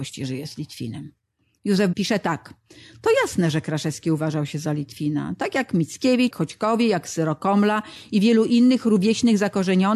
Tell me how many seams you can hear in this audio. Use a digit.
2